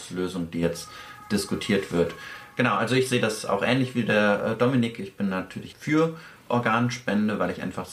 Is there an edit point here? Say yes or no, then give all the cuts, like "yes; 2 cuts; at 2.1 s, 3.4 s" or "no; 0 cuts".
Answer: yes; 1 cut; at 5.7 s